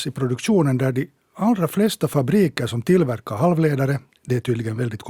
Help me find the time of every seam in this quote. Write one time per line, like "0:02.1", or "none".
0:04.1